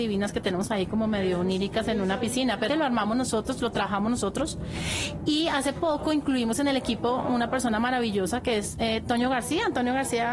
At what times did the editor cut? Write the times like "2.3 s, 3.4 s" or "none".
2.7 s